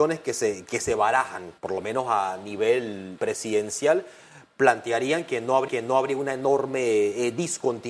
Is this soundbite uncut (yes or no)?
no